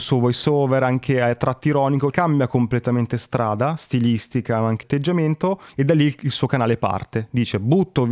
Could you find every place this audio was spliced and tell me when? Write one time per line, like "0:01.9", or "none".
0:02.1
0:04.8
0:05.7